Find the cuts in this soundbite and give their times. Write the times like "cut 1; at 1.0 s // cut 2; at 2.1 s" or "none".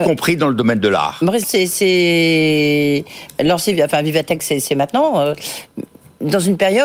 cut 1; at 1.4 s